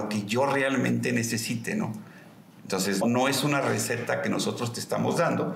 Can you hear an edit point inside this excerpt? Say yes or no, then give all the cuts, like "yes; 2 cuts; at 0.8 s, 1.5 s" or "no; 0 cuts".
yes; 1 cut; at 3.0 s